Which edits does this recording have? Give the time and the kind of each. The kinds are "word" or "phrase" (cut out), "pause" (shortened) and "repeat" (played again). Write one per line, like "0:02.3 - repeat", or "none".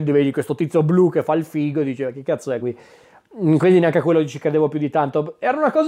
0:02.6 - word